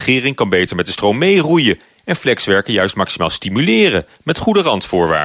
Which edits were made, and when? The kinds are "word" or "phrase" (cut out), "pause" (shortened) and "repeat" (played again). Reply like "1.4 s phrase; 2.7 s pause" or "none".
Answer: none